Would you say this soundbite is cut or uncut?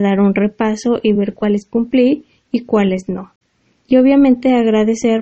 uncut